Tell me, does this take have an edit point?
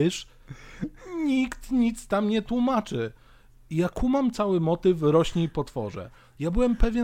no; 0 cuts

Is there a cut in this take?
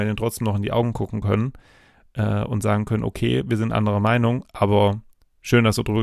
no; 0 cuts

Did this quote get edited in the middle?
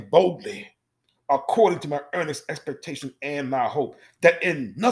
yes; 1 cut; at 1.0 s

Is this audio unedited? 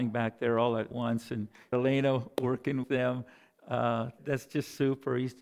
no; 4 cuts; at 0.9 s, 1.7 s, 2.8 s, 4.2 s

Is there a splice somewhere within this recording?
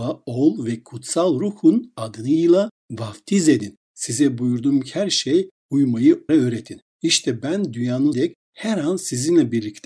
yes; 2 cuts; at 6.3 s, 8.1 s

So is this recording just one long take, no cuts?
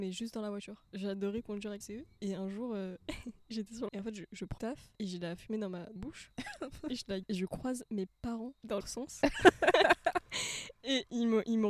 no; 6 cuts; at 1.8 s, 3.9 s, 4.6 s, 6.0 s, 7.2 s, 8.8 s

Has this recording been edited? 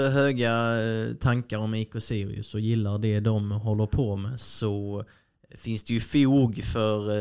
no; 0 cuts

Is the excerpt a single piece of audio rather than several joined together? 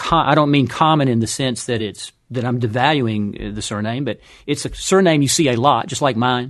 yes; 0 cuts

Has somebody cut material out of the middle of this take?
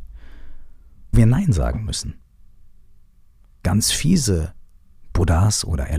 yes; 1 cut; at 1.1 s

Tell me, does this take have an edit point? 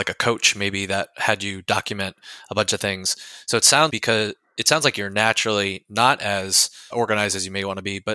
yes; 2 cuts; at 3.9 s, 6.9 s

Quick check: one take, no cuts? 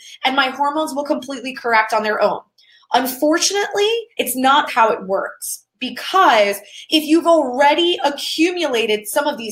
no; 2 cuts; at 4.1 s, 4.7 s

